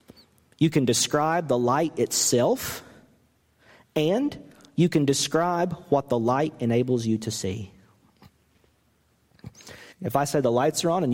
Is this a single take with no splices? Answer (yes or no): no